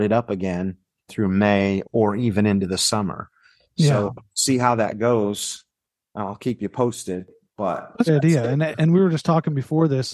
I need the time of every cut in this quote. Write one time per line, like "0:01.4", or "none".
0:01.1
0:01.8
0:08.1